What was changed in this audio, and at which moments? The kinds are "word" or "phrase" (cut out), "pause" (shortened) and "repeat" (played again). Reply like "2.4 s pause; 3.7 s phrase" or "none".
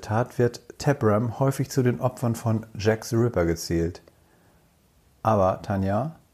none